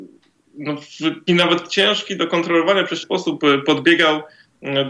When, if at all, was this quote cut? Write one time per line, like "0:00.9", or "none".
0:01.3
0:03.0